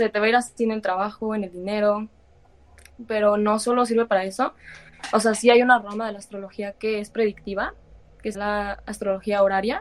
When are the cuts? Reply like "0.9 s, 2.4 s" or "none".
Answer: 8.3 s